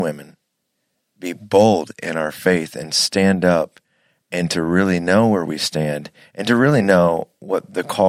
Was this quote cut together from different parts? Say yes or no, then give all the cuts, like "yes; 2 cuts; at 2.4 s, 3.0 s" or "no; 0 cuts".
no; 0 cuts